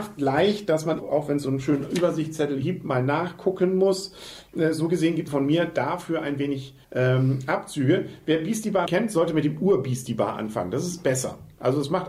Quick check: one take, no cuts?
no; 5 cuts; at 1.0 s, 2.6 s, 5.3 s, 6.8 s, 8.9 s

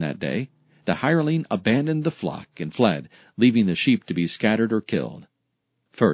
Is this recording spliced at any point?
no; 0 cuts

